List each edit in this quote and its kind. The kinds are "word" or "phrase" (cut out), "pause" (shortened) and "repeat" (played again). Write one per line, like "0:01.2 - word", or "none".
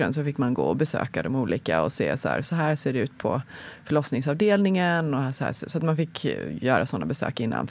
none